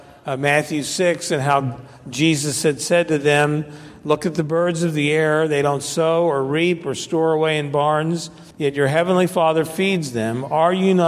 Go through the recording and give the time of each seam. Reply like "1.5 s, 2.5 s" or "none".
8.5 s